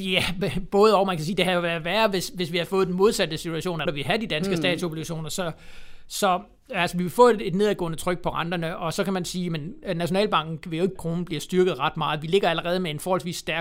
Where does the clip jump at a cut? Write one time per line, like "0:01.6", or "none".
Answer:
0:03.9
0:11.0